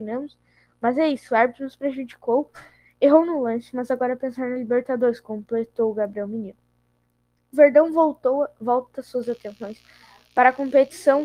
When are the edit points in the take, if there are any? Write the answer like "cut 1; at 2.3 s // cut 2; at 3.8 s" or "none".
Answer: none

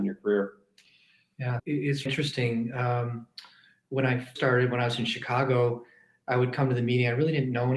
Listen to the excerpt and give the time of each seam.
cut 1; at 1.6 s // cut 2; at 2.1 s // cut 3; at 4.4 s

